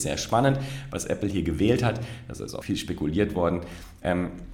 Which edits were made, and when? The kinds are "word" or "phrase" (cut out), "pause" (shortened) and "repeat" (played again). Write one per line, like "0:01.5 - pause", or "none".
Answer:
0:02.6 - word